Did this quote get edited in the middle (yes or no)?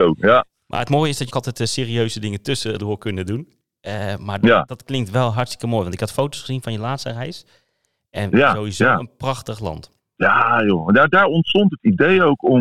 yes